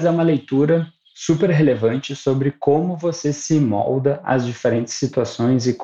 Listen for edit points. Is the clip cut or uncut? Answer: uncut